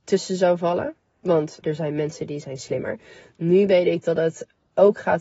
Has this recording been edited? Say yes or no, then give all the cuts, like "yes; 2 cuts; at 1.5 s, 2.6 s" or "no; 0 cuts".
yes; 1 cut; at 1.6 s